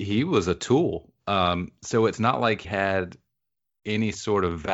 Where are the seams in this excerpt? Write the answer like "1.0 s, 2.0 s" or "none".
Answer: 2.6 s